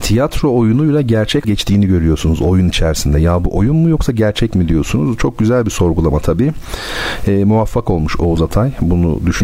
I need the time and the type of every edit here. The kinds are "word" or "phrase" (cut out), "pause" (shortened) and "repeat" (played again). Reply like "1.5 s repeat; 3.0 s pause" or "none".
1.4 s phrase